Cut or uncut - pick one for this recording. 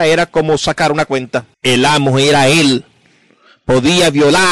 cut